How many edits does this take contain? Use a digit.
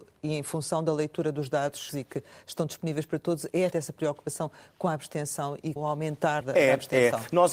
4